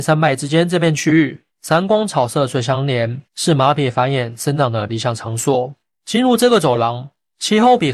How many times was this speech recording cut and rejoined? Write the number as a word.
two